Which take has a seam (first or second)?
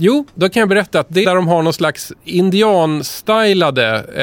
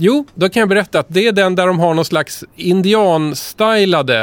first